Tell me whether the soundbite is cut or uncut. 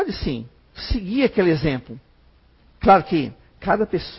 cut